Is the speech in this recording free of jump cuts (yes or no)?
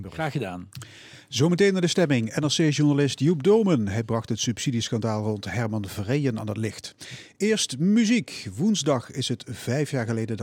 yes